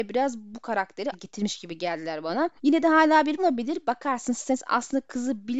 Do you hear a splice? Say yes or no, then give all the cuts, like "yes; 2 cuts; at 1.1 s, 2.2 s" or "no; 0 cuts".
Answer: yes; 3 cuts; at 1.1 s, 2.6 s, 3.4 s